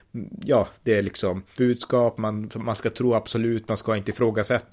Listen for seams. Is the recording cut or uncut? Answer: cut